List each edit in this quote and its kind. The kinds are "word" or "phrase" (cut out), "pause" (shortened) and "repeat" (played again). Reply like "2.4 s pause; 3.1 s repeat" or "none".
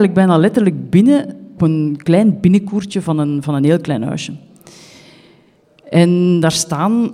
1.6 s word